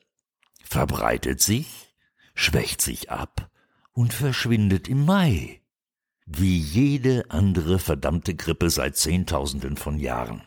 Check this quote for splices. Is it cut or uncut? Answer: uncut